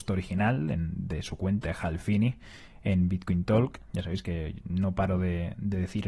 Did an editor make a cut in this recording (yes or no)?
yes